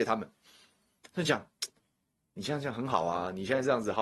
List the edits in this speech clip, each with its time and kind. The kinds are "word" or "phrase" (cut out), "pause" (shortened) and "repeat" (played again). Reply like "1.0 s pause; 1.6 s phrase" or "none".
none